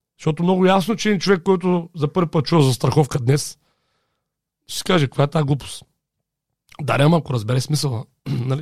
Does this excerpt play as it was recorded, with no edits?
yes; 0 cuts

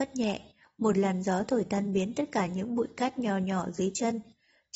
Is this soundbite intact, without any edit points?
yes; 0 cuts

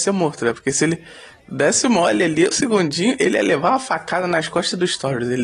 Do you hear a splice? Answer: yes; 1 cut; at 2.5 s

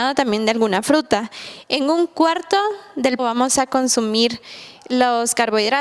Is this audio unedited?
no; 1 cut; at 3.2 s

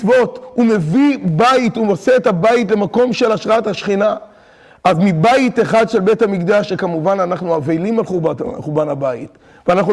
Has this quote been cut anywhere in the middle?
no; 0 cuts

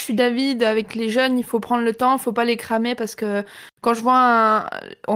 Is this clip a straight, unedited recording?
yes; 0 cuts

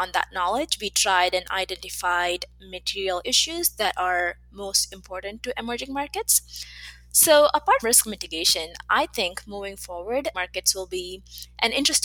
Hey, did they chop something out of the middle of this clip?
yes; 3 cuts; at 3.2 s, 7.8 s, 10.3 s

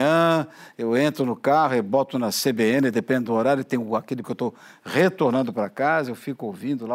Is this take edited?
yes; 1 cut; at 4.2 s

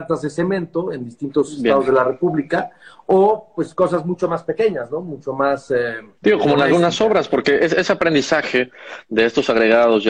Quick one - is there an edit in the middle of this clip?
no; 0 cuts

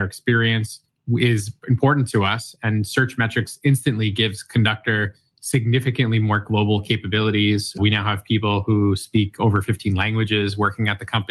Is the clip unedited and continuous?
yes; 0 cuts

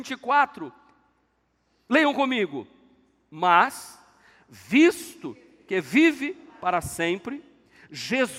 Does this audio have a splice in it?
no; 0 cuts

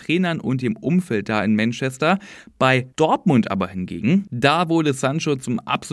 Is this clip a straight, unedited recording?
no; 1 cut; at 2.9 s

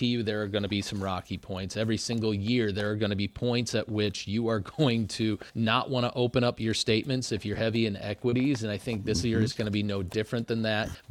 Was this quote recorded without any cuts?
no; 1 cut; at 5.5 s

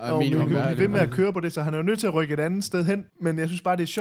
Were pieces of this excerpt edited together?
yes; 1 cut; at 3.1 s

